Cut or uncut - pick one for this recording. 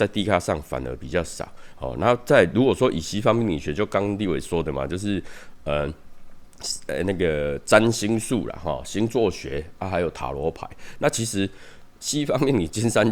uncut